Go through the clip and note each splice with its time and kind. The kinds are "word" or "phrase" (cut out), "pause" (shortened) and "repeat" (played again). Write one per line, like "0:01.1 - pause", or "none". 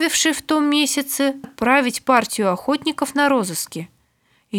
0:01.4 - word

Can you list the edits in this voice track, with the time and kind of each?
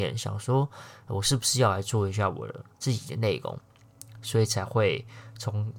0:02.7 - pause

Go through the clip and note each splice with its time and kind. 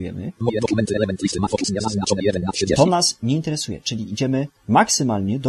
0:04.6 - pause

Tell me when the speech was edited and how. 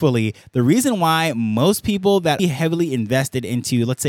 0:02.4 - phrase

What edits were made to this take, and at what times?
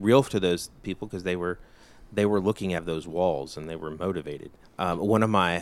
0:02.8 - phrase
0:04.6 - pause

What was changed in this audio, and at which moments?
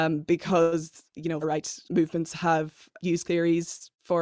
0:01.4 - word
0:01.8 - pause
0:03.2 - word

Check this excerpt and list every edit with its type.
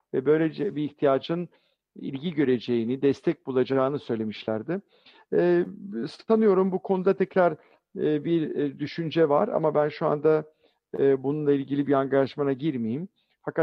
none

